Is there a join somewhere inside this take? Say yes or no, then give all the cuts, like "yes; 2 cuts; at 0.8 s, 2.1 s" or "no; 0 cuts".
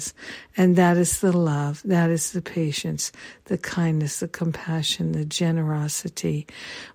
no; 0 cuts